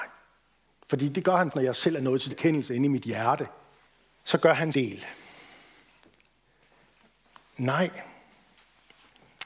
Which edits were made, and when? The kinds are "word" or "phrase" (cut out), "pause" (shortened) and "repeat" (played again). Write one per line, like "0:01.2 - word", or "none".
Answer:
0:01.5 - word
0:02.3 - word
0:03.8 - pause
0:04.7 - word